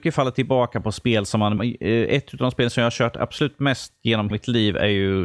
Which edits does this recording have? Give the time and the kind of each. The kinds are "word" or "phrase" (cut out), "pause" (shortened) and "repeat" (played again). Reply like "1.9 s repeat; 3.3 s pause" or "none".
1.6 s word; 4.3 s word